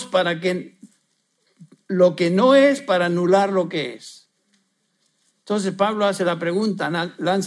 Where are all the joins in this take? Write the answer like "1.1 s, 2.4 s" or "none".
none